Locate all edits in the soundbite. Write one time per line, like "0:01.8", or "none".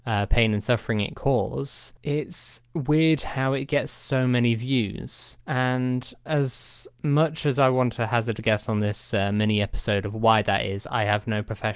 0:01.1
0:02.0
0:05.4

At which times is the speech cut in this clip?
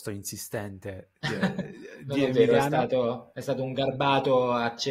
none

